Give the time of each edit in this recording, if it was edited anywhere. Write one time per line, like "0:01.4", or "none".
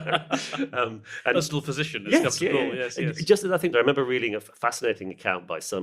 0:01.3
0:03.7